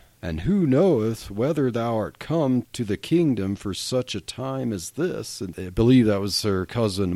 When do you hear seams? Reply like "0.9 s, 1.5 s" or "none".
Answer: 5.5 s